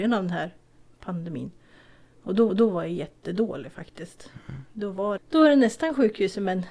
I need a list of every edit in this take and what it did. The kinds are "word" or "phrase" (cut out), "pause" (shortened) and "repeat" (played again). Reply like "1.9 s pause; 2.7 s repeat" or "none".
2.5 s repeat; 5.2 s word